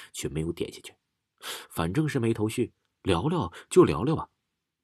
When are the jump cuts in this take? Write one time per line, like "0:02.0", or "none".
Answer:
none